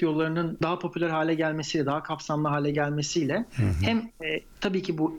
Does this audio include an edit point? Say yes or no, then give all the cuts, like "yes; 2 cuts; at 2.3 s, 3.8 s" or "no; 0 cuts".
no; 0 cuts